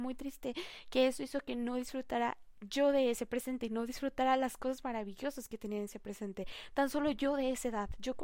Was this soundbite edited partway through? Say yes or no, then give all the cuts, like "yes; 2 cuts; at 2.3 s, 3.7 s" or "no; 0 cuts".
no; 0 cuts